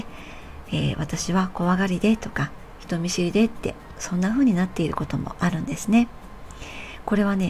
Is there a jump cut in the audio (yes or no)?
no